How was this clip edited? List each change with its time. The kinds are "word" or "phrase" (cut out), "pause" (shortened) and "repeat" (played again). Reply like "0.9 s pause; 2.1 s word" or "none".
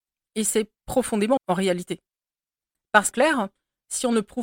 1.4 s word; 3.1 s word